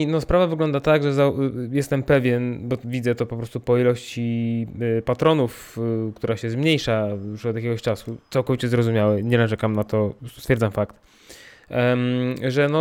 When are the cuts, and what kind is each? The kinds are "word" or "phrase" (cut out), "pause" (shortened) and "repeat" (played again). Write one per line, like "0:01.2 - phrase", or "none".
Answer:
0:08.2 - pause
0:10.2 - pause